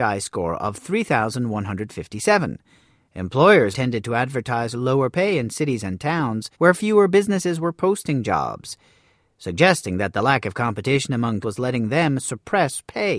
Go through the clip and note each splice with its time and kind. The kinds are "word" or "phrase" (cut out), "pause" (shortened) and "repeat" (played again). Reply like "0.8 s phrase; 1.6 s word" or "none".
3.7 s word; 6.5 s pause; 11.4 s word